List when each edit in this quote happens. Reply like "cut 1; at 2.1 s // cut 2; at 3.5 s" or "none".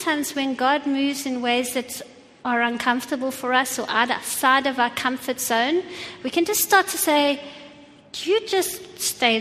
none